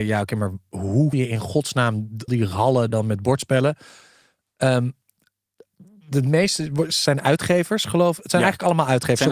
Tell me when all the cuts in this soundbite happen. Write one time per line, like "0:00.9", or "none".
0:01.1
0:02.3
0:02.9